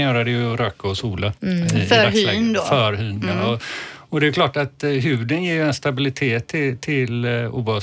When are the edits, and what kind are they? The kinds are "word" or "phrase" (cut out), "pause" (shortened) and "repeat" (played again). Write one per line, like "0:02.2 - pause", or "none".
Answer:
0:01.4 - pause